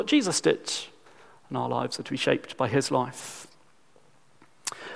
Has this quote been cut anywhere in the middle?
no; 0 cuts

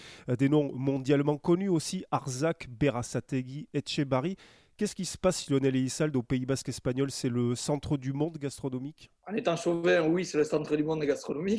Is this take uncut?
yes; 0 cuts

